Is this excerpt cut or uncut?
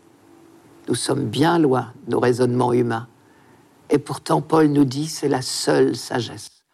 uncut